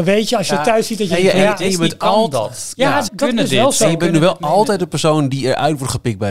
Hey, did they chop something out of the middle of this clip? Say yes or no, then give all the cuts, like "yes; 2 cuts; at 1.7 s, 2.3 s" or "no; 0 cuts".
yes; 1 cut; at 3.1 s